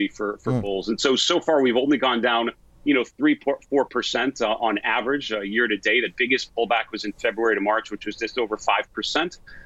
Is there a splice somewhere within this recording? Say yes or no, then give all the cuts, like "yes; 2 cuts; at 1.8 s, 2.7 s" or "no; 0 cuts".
no; 0 cuts